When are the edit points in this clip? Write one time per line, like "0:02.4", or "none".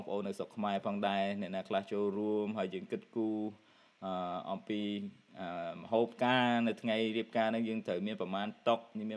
none